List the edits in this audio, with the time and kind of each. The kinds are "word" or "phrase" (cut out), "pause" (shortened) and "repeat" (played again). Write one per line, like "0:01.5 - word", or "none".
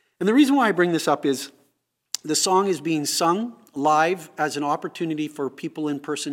none